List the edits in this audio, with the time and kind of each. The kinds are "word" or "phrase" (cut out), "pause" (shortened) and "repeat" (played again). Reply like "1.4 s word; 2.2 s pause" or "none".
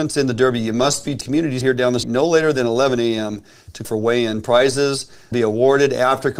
1.2 s word; 1.6 s word; 2.0 s word; 3.8 s word; 5.3 s word